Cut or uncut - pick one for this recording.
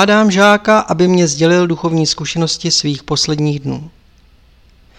uncut